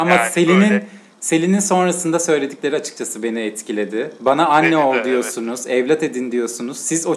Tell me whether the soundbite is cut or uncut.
uncut